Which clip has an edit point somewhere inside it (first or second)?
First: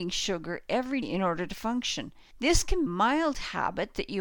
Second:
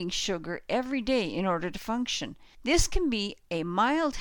first